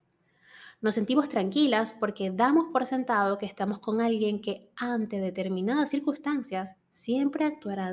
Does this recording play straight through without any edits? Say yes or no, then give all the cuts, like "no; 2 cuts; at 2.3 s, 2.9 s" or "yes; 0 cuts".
no; 1 cut; at 6.8 s